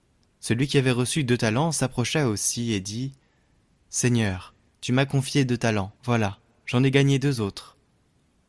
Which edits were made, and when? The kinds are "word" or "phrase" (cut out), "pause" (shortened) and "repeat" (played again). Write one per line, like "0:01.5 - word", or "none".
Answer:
0:04.7 - pause
0:06.0 - pause

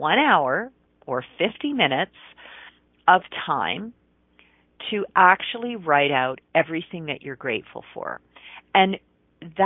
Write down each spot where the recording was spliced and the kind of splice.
none

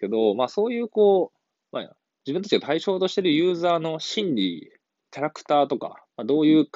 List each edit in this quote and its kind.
none

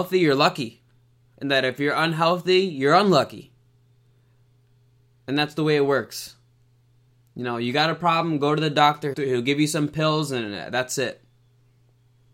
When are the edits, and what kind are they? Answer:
0:07.1 - pause
0:09.1 - word

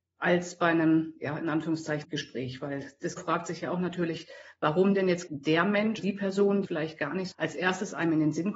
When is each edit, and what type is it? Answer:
0:02.0 - word
0:03.2 - word
0:05.3 - word
0:06.0 - word
0:06.6 - word
0:07.3 - word

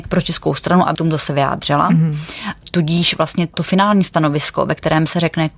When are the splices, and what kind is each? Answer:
0:00.9 - word

